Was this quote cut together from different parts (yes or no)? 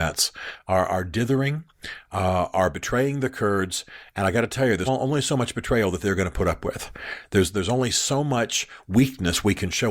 yes